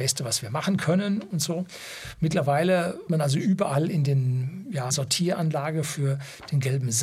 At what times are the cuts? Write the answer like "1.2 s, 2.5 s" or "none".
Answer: 3.1 s, 4.9 s

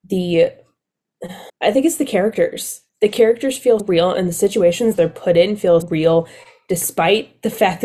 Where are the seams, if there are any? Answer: 1.5 s, 2.9 s, 3.8 s, 5.8 s

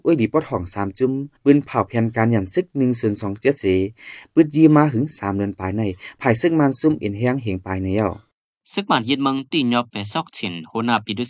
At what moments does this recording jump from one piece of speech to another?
1.4 s

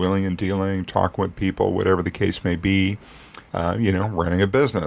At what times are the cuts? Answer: 3.5 s

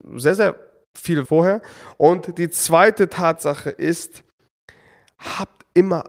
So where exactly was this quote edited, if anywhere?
1.3 s

